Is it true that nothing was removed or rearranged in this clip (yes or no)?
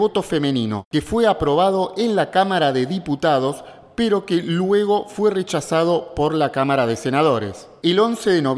yes